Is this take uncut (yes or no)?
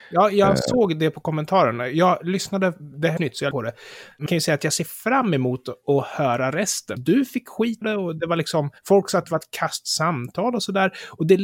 no